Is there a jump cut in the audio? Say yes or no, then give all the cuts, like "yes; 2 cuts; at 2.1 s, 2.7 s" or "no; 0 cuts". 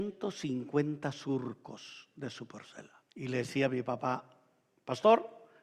yes; 1 cut; at 3.1 s